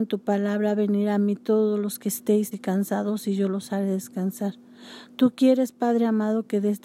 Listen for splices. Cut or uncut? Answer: cut